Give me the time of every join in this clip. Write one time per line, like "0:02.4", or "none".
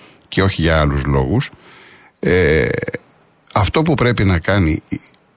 none